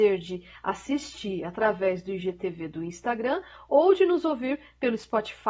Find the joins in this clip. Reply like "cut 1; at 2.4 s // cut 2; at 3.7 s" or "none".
none

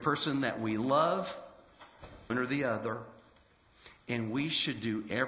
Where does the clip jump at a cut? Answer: cut 1; at 2.3 s

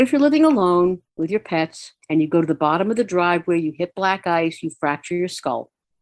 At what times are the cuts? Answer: cut 1; at 1.1 s // cut 2; at 2.0 s

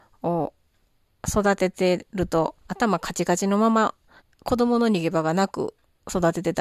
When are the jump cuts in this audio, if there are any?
cut 1; at 2.6 s // cut 2; at 4.2 s

